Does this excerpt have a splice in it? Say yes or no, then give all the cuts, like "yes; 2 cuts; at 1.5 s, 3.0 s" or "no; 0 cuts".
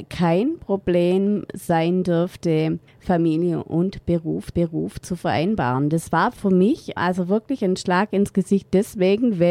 yes; 3 cuts; at 2.9 s, 4.5 s, 7.0 s